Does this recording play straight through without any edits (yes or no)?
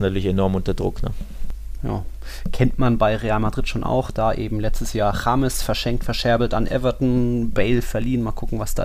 yes